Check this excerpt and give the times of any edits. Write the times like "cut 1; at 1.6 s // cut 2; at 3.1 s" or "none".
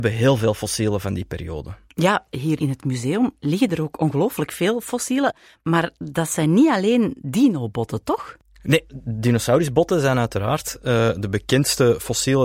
none

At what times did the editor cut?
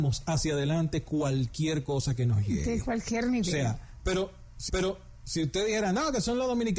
cut 1; at 4.7 s

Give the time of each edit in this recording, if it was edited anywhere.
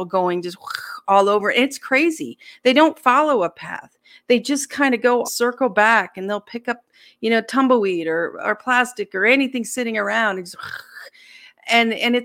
cut 1; at 5.2 s

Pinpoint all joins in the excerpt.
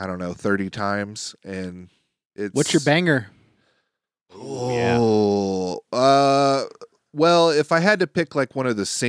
none

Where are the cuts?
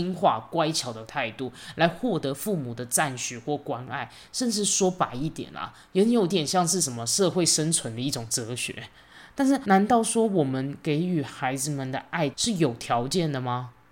none

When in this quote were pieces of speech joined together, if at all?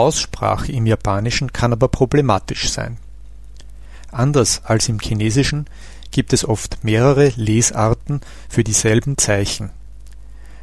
none

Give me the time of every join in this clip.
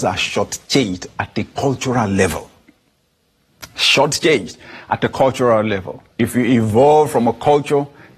cut 1; at 6.1 s

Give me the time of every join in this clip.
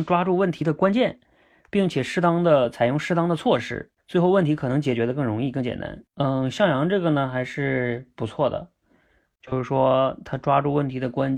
cut 1; at 4.0 s // cut 2; at 6.1 s

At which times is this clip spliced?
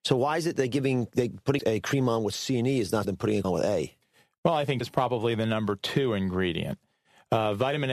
cut 1; at 1.6 s // cut 2; at 3.0 s // cut 3; at 3.4 s // cut 4; at 4.8 s

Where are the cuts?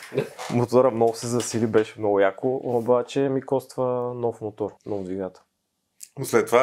cut 1; at 4.8 s

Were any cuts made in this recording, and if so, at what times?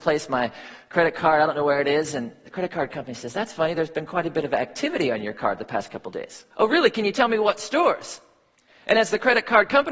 cut 1; at 6.5 s

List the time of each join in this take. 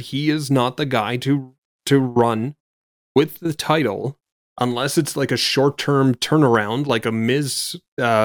none

